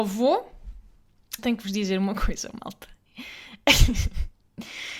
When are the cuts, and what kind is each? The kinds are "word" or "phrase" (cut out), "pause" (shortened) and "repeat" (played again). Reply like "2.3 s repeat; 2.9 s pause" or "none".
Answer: 1.4 s word